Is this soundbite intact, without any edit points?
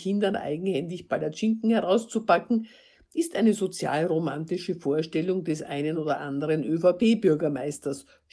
yes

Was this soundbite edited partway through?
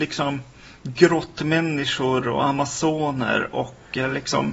no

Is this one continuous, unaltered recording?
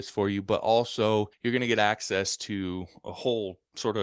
no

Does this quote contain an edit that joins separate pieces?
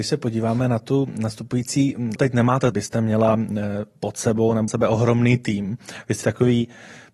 yes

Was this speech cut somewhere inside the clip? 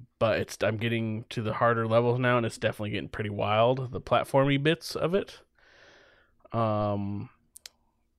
no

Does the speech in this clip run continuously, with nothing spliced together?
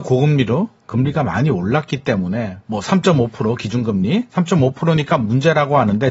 yes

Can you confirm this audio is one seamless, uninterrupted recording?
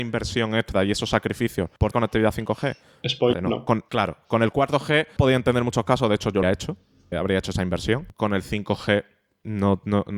no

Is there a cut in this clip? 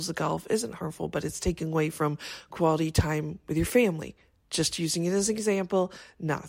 no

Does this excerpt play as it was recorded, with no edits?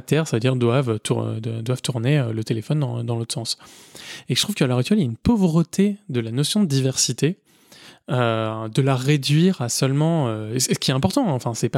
yes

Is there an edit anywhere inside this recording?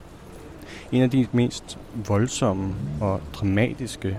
no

